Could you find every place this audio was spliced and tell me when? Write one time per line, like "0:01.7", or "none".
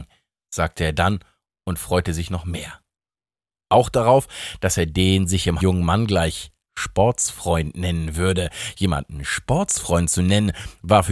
0:05.6